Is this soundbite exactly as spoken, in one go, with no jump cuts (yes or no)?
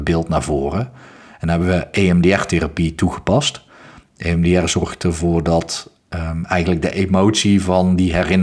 yes